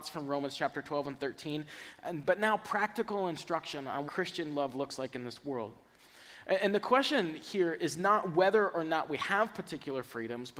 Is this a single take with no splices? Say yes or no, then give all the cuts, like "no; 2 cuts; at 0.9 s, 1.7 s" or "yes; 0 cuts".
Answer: no; 1 cut; at 4.1 s